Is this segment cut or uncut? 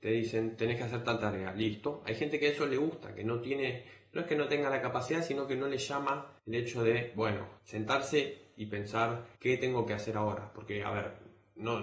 cut